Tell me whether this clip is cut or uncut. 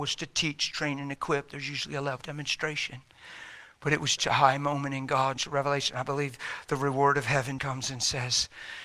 cut